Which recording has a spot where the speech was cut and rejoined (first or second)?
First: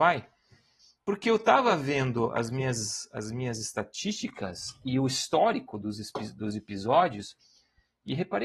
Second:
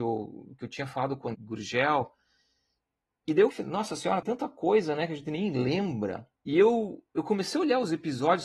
second